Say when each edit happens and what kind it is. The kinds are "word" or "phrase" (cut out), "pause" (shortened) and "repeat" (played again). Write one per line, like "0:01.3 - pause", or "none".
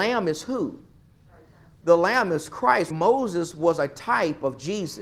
0:02.9 - word